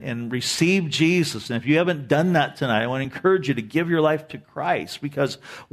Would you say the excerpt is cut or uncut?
uncut